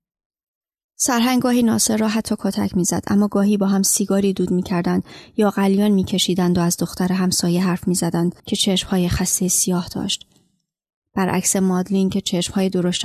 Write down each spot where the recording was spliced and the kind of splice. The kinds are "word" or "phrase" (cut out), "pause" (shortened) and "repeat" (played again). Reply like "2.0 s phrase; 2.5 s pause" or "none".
8.4 s pause